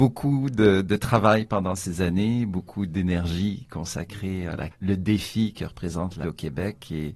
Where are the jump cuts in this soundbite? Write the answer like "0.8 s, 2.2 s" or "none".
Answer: 4.7 s, 6.2 s